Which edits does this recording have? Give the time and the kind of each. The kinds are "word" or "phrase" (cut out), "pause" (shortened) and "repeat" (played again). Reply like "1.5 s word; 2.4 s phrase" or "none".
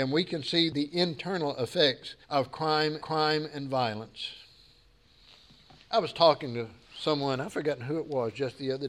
2.2 s pause; 3.0 s repeat